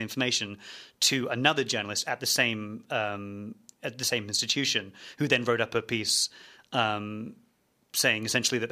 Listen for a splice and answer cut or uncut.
uncut